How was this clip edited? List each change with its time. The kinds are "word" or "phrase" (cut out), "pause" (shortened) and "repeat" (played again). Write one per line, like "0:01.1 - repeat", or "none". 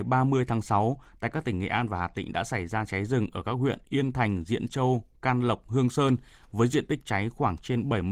none

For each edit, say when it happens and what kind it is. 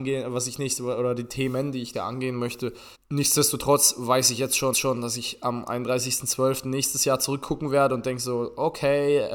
0:01.9 - word
0:02.9 - pause
0:04.7 - repeat

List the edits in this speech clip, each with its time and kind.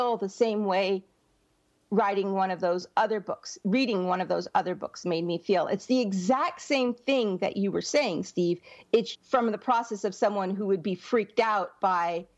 0:09.2 - word

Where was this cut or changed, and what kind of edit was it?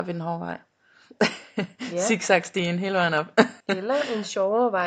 0:03.6 - pause

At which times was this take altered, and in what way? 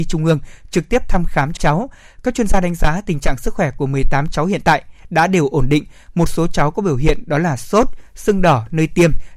0:01.6 - word

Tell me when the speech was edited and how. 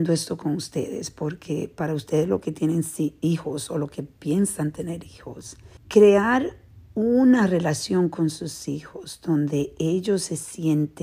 0:05.8 - pause

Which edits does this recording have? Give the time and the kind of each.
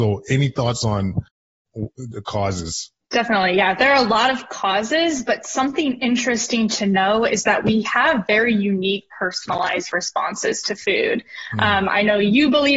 0:03.0 - pause

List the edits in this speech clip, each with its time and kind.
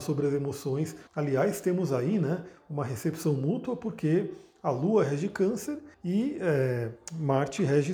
0:01.1 - pause
0:05.9 - pause

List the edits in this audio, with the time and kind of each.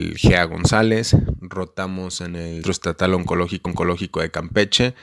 0:02.6 - word
0:03.7 - repeat

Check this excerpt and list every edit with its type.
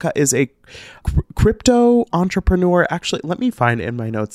0:01.0 - word

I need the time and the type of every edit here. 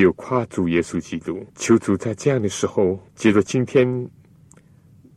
0:01.5 - pause
0:03.1 - pause

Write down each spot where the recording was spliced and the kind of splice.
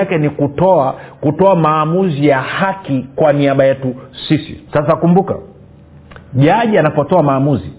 0:04.7 - pause

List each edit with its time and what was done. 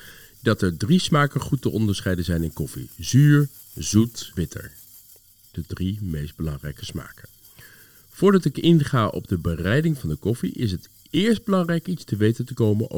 0:04.3 - word

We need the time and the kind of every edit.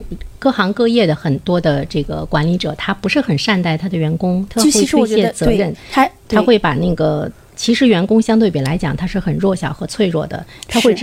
0:04.5 - phrase

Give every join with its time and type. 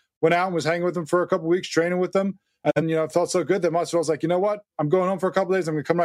0:02.8 - word

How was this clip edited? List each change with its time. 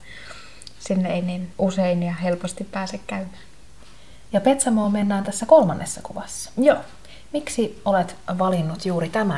none

